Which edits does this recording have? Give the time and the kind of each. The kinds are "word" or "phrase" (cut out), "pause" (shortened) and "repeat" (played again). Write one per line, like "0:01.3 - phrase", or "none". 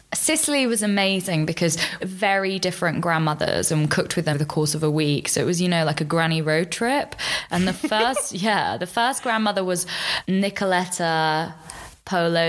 0:02.0 - phrase
0:04.3 - word
0:10.3 - word